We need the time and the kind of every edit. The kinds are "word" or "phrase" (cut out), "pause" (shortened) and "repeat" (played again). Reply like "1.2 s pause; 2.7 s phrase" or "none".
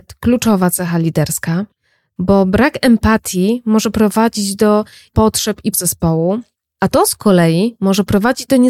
5.1 s word; 5.7 s word